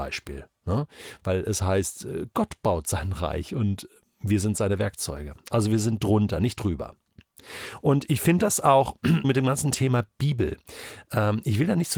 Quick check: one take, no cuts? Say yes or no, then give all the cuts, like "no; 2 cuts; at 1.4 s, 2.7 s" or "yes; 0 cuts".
no; 1 cut; at 9.2 s